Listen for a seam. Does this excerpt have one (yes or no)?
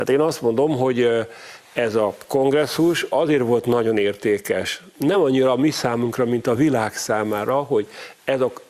no